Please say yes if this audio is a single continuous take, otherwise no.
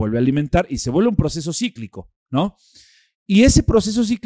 yes